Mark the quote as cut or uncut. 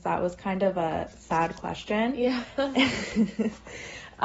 uncut